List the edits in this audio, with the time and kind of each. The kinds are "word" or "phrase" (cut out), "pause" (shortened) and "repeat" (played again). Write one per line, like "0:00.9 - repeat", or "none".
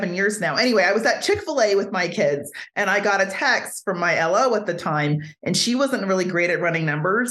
none